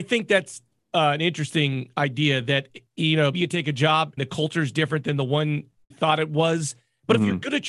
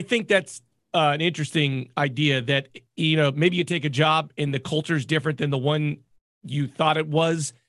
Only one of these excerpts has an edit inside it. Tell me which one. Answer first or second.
first